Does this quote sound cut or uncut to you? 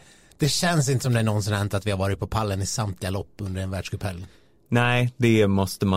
uncut